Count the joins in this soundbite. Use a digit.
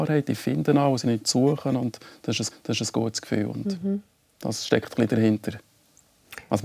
2